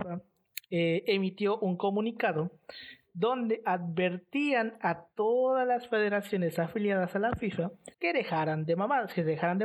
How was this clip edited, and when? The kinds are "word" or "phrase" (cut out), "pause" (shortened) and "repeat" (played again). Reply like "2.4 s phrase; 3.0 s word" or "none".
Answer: 7.9 s pause